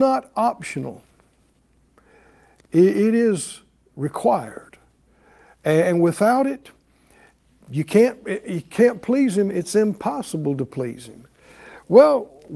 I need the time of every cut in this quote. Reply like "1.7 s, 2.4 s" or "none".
none